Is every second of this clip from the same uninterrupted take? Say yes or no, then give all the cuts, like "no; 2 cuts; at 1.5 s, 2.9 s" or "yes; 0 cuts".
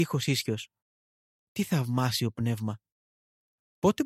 yes; 0 cuts